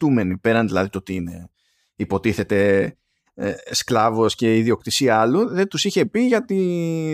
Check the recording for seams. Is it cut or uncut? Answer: uncut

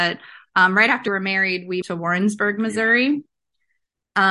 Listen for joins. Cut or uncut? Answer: cut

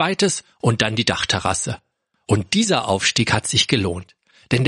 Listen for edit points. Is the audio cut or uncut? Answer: uncut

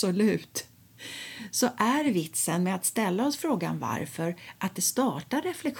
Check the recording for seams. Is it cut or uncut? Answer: uncut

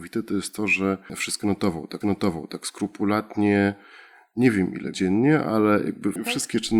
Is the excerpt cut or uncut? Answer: cut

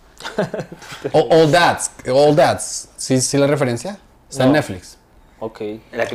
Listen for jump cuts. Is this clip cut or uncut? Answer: uncut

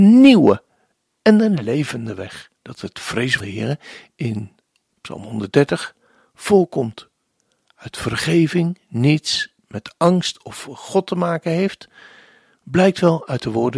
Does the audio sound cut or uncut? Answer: cut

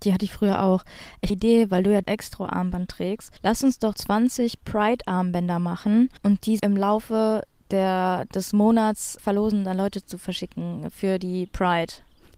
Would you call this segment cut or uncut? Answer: cut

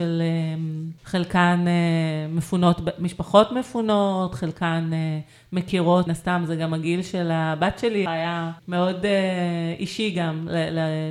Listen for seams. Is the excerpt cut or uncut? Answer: cut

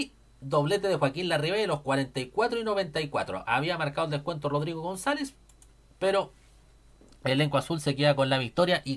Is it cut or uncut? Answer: uncut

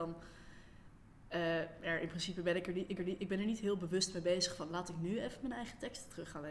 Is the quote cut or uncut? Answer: cut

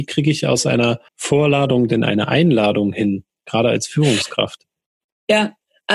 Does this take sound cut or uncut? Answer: cut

